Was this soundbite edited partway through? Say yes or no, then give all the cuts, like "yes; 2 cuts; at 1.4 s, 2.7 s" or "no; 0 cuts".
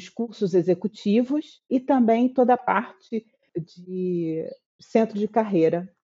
no; 0 cuts